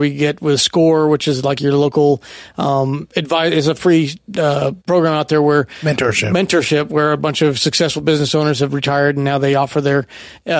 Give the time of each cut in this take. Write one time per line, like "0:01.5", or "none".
0:04.8